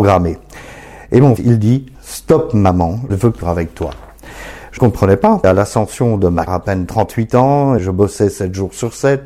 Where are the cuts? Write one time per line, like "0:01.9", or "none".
0:01.4
0:01.9
0:03.1
0:03.4
0:04.8
0:05.4
0:06.5
0:07.8